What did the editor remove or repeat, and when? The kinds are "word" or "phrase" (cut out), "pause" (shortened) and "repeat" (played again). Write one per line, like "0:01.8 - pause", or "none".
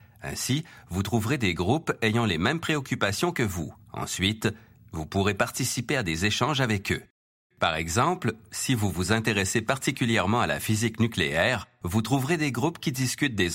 0:03.8 - pause